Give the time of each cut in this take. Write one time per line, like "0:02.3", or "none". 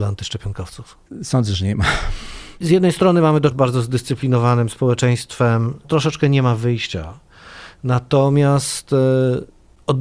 0:03.5
0:05.8